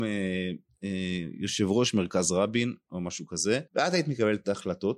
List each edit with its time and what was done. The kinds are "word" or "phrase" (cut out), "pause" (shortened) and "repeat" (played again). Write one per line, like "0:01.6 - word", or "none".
0:03.7 - pause